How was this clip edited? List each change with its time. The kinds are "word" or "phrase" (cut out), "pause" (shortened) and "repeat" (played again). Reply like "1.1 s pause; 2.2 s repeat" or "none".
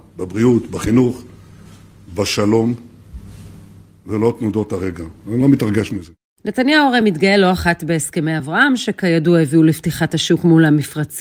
none